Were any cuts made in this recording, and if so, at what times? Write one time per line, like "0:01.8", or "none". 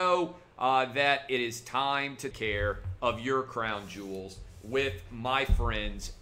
0:02.3